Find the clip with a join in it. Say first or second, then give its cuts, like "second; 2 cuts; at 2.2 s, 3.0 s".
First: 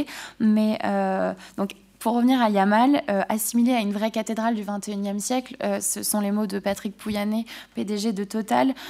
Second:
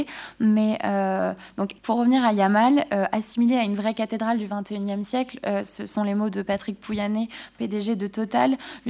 second; 1 cut; at 1.8 s